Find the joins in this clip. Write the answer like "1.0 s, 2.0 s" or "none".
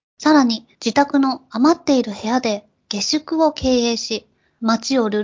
none